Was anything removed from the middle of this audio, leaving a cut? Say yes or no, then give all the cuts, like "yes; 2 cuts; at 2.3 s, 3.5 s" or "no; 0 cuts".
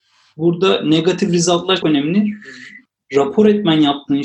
yes; 1 cut; at 1.8 s